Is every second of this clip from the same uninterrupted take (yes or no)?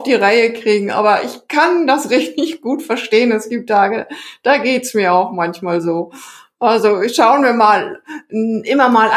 yes